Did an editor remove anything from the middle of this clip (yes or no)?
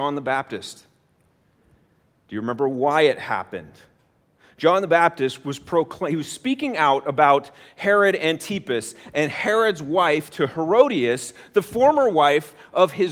no